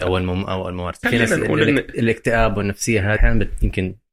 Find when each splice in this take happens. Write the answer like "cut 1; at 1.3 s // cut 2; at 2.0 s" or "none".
cut 1; at 1.0 s // cut 2; at 3.2 s